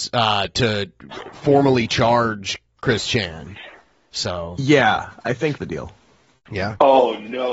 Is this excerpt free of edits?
no; 1 cut; at 5.6 s

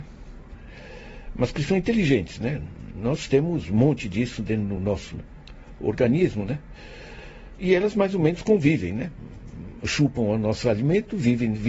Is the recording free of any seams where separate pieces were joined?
yes; 0 cuts

